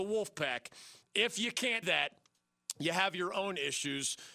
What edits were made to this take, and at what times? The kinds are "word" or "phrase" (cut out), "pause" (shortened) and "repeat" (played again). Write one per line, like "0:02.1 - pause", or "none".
0:01.8 - word

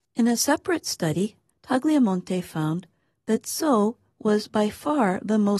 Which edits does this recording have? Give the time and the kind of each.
none

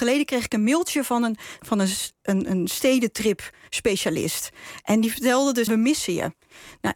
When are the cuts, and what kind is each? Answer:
0:01.6 - word
0:05.7 - phrase

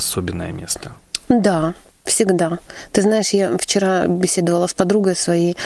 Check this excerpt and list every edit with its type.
0:04.0 - word

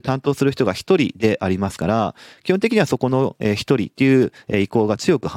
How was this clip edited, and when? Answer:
none

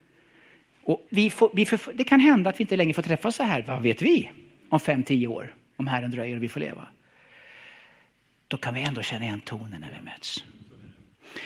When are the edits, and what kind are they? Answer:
0:01.1 - word

